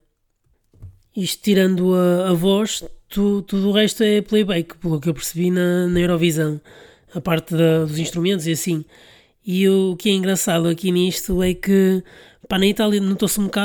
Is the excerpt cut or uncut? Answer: uncut